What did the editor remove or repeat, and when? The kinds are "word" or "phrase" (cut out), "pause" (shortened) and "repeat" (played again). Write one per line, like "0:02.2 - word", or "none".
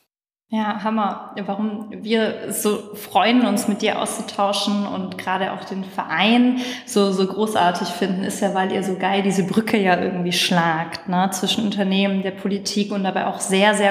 none